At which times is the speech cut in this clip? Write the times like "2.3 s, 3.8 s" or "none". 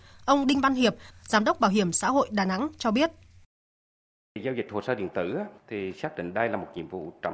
5.6 s